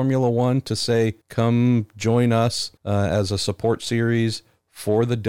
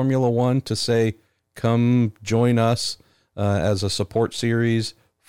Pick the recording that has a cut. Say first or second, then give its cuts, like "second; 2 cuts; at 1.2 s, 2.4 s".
first; 2 cuts; at 1.2 s, 2.8 s